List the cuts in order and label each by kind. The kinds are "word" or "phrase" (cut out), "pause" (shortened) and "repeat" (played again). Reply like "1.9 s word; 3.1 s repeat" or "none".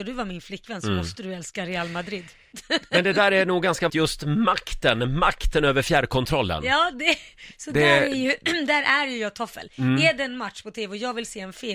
3.9 s word